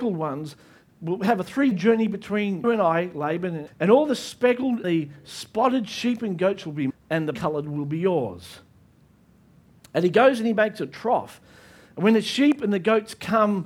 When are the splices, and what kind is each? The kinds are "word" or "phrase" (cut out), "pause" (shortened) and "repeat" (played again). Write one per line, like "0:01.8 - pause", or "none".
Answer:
0:01.7 - word
0:02.6 - word
0:03.7 - word
0:04.8 - word
0:06.9 - word
0:07.3 - word